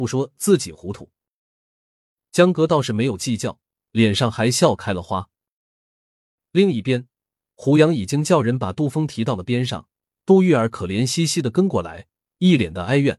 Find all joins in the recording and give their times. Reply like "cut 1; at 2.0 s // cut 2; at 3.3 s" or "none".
none